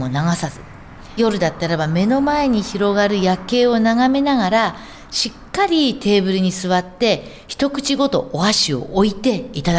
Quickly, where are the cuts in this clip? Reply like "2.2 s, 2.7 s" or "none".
1.2 s